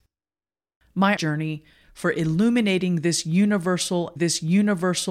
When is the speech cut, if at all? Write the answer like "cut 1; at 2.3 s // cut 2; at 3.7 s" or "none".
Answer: cut 1; at 1.2 s // cut 2; at 1.8 s // cut 3; at 4.2 s